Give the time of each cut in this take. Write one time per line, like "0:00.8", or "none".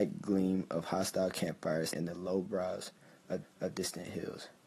0:01.9
0:03.4